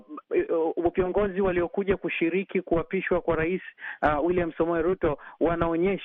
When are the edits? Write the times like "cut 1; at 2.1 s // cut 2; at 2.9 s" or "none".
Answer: none